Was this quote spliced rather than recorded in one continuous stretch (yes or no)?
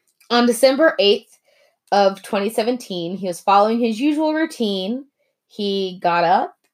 no